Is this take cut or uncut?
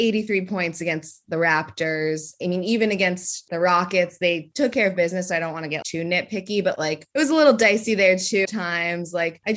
cut